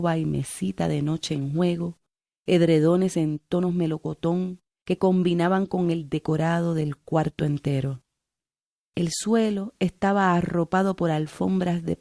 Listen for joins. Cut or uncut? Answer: uncut